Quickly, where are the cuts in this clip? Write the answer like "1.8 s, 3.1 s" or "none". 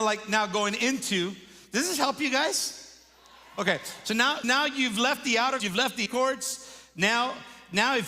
4.4 s, 5.6 s, 6.1 s